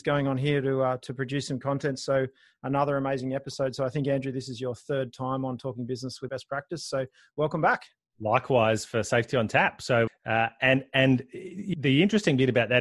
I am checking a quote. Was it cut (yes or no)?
yes